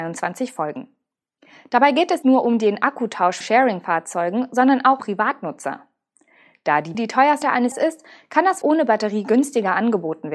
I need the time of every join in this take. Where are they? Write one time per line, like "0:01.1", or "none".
0:02.2
0:03.4
0:05.0
0:06.9
0:07.4
0:07.7
0:08.6